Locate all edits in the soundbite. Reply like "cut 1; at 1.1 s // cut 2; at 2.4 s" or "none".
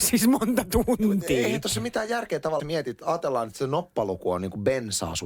cut 1; at 2.6 s